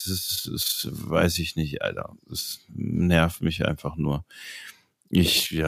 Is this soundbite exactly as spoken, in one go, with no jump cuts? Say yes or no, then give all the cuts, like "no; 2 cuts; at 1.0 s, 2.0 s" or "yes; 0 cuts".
yes; 0 cuts